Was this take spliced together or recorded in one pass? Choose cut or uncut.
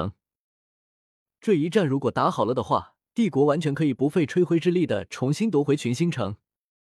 cut